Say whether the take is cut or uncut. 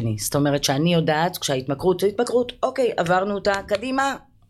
uncut